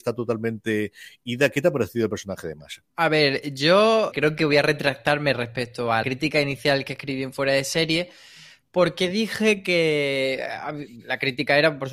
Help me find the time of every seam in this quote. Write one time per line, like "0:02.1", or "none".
0:02.9
0:04.1
0:06.0